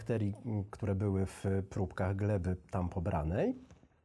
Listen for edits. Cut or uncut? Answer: uncut